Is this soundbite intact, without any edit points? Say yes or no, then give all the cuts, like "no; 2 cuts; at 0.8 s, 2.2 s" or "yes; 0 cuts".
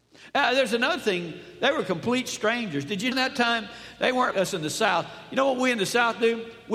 no; 2 cuts; at 3.1 s, 4.3 s